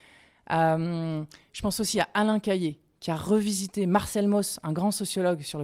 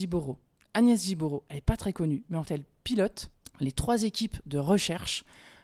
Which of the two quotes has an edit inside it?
second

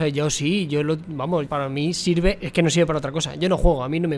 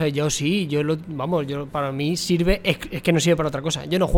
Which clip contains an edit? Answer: first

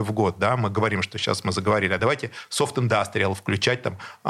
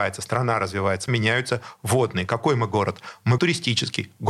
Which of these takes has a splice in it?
second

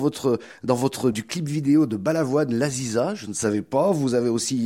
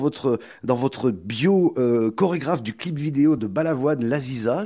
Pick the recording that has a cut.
first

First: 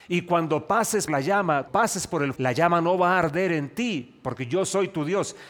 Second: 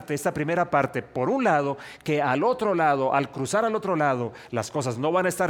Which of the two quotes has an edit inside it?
first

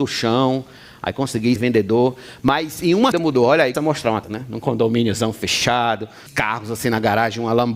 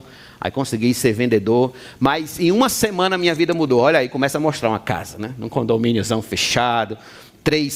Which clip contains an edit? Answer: first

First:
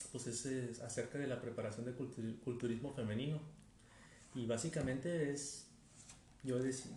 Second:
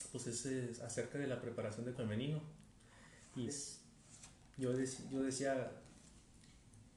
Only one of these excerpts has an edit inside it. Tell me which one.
second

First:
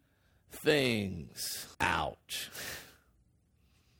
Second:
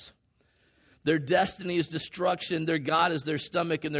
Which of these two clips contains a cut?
first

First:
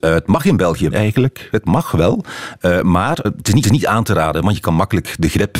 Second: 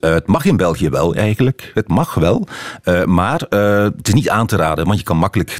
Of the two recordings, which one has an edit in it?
first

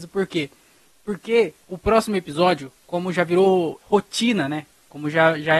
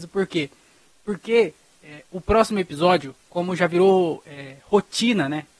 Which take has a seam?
first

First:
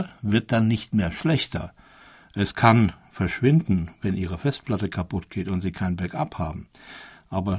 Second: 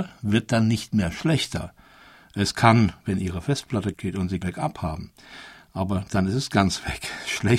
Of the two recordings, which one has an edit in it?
second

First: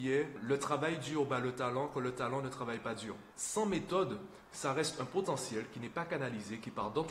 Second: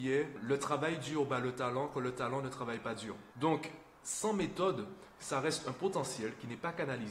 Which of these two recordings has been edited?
first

